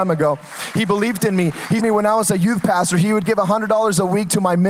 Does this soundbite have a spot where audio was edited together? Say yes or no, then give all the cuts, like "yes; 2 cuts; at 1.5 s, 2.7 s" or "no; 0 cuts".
yes; 1 cut; at 1.8 s